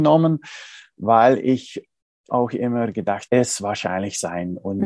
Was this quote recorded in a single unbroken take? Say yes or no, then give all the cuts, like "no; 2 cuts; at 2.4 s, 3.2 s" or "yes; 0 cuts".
no; 2 cuts; at 2.3 s, 3.3 s